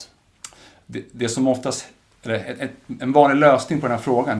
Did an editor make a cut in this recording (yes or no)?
no